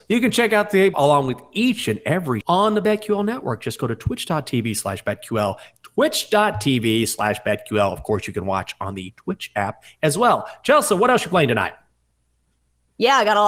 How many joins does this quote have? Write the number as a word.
two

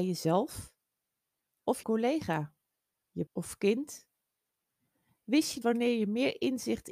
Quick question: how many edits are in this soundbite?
three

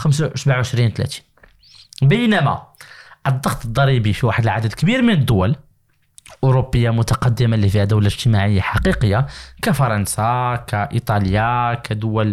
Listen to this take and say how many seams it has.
zero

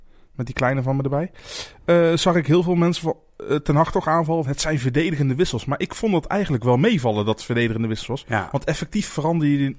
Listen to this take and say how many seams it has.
one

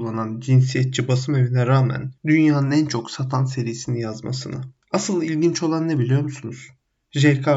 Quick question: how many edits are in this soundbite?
one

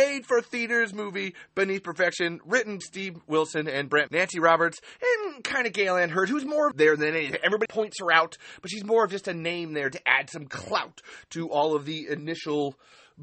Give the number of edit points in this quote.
four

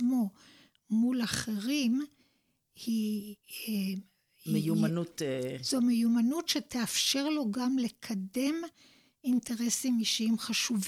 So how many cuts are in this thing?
zero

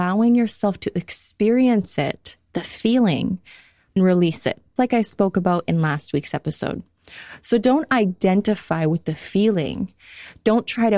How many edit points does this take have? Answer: two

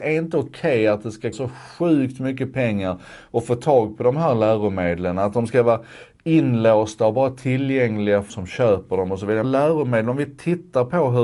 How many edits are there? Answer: three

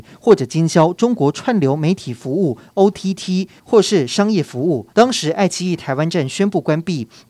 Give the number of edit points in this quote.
one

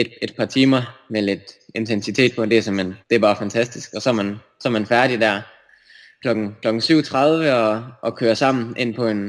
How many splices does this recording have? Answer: one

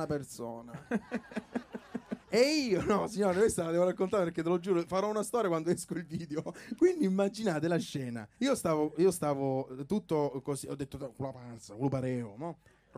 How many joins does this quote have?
one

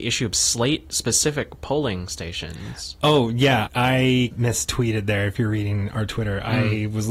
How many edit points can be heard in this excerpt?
two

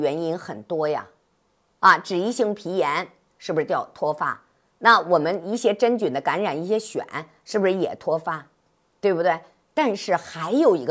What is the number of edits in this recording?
zero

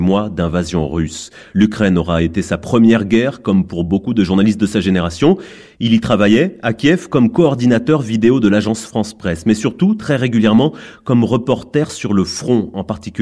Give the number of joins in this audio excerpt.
zero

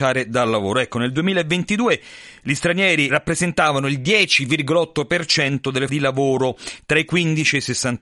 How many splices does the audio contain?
two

